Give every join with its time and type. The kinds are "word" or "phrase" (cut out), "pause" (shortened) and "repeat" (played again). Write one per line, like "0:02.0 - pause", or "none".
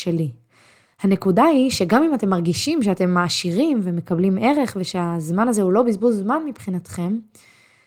none